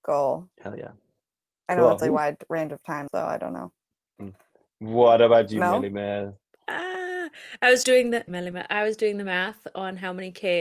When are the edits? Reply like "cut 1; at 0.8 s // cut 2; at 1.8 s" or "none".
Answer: cut 1; at 2.0 s // cut 2; at 3.1 s // cut 3; at 7.8 s // cut 4; at 8.3 s